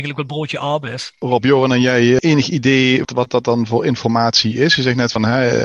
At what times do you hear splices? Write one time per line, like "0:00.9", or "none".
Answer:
0:01.4